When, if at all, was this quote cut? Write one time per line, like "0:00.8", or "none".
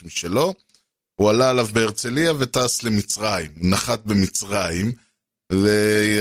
none